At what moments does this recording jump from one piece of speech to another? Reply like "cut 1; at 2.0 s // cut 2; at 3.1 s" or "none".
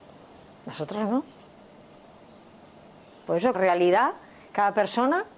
cut 1; at 3.5 s